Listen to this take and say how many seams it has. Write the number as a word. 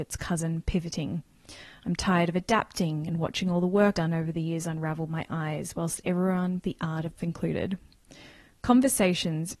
four